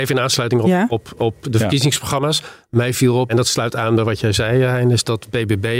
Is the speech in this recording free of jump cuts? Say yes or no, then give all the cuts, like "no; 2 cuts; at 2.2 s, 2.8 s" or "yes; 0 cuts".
no; 1 cut; at 3.3 s